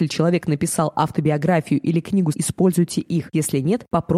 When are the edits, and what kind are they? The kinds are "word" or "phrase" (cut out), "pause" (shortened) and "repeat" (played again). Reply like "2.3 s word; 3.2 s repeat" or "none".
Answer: 2.3 s phrase